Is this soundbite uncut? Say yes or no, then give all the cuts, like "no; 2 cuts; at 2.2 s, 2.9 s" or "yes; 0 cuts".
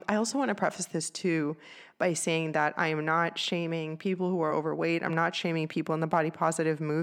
yes; 0 cuts